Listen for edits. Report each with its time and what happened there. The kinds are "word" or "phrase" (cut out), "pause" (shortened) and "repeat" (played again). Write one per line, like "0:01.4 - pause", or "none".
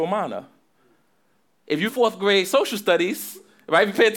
0:01.9 - word